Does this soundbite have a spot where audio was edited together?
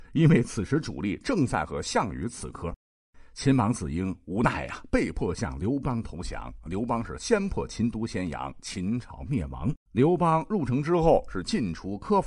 yes; 1 cut; at 9.8 s

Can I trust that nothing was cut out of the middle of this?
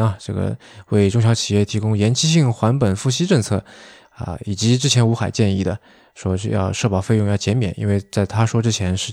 yes; 0 cuts

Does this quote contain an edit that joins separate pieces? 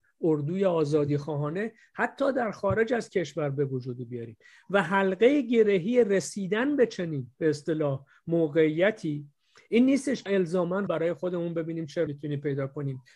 yes; 3 cuts; at 10.3 s, 10.9 s, 12.1 s

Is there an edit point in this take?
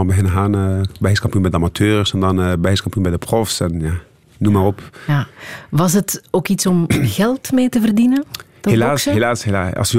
no; 0 cuts

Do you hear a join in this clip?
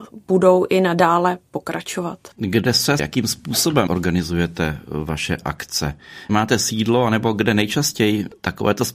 yes; 4 cuts; at 2.3 s, 3.0 s, 3.9 s, 6.3 s

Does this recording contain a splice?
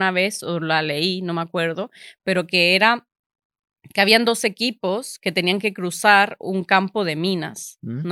no; 0 cuts

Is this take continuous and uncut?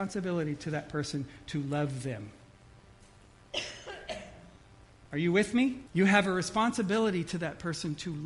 no; 1 cut; at 5.9 s

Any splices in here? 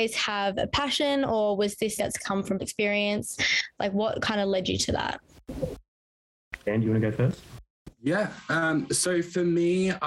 yes; 2 cuts; at 2.0 s, 2.6 s

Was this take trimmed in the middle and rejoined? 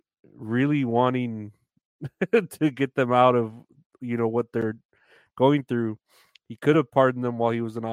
no; 0 cuts

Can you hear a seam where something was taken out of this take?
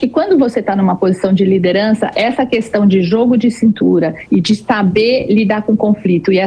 no; 0 cuts

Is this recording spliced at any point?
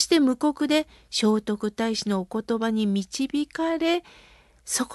no; 0 cuts

